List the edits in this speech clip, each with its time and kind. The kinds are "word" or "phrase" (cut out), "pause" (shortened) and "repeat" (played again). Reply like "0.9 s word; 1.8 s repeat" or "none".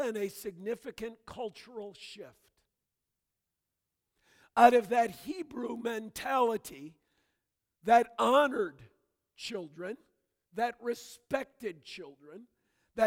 none